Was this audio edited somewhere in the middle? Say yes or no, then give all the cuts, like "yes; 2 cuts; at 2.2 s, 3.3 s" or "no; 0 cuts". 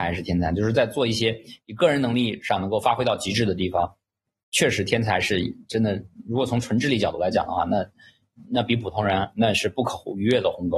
no; 0 cuts